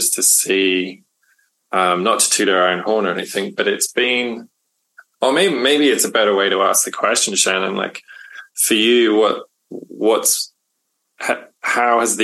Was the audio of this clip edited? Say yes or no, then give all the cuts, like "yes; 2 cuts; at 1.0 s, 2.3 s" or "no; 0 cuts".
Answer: no; 0 cuts